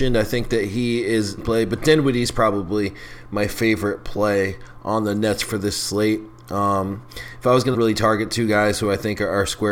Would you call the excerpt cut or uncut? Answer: cut